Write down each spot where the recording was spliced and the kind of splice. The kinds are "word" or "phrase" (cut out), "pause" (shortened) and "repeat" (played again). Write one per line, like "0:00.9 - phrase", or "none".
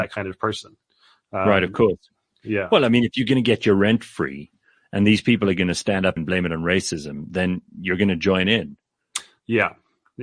0:06.2 - phrase